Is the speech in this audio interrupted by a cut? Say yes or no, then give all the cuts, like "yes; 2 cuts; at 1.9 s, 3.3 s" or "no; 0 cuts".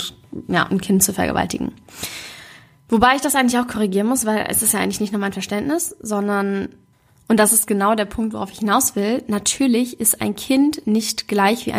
no; 0 cuts